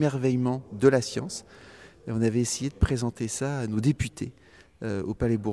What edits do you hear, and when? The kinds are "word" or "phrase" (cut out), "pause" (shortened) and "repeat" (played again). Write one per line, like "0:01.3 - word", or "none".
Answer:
none